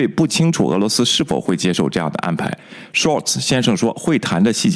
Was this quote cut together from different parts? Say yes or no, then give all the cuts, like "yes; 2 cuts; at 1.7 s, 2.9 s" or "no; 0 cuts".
no; 0 cuts